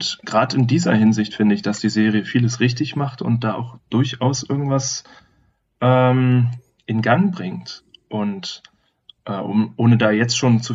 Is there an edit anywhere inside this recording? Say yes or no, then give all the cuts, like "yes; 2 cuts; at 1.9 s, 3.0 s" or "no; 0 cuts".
no; 0 cuts